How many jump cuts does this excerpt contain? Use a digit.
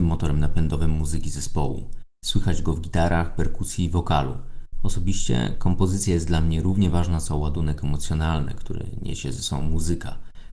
0